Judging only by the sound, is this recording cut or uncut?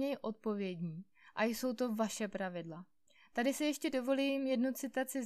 uncut